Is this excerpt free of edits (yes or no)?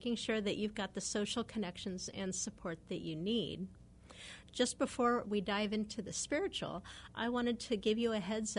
yes